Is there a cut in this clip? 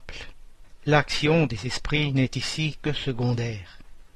no; 0 cuts

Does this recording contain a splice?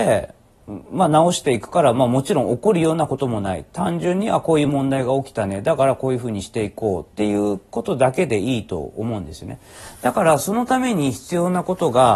no; 0 cuts

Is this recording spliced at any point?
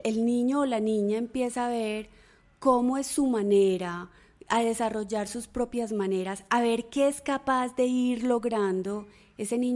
no; 0 cuts

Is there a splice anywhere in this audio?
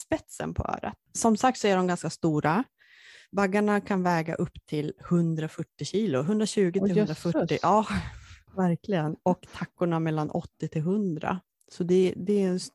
no; 0 cuts

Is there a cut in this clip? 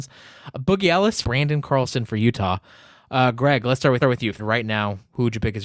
yes; 3 cuts; at 1.2 s, 4.0 s, 4.4 s

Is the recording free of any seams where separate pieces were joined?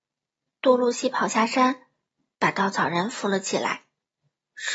yes; 0 cuts

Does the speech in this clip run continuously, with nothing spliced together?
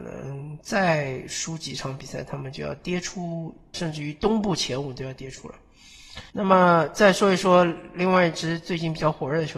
no; 2 cuts; at 3.7 s, 6.3 s

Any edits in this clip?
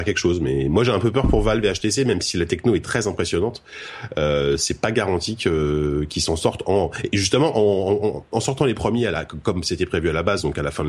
no; 0 cuts

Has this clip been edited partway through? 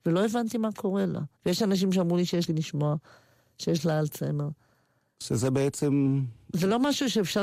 yes; 2 cuts; at 1.4 s, 2.5 s

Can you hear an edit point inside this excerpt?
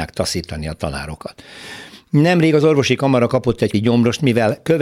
yes; 1 cut; at 3.7 s

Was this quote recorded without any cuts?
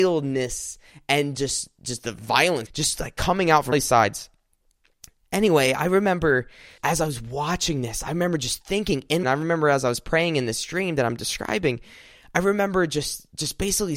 no; 4 cuts; at 2.7 s, 3.7 s, 6.8 s, 9.2 s

